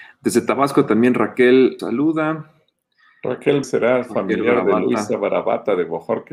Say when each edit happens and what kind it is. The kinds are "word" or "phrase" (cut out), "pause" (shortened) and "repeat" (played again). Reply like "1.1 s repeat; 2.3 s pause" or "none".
1.8 s word; 3.6 s phrase